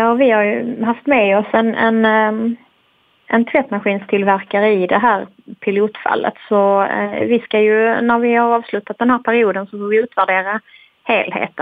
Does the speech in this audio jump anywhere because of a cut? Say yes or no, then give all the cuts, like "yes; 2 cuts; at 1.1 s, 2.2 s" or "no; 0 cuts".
no; 0 cuts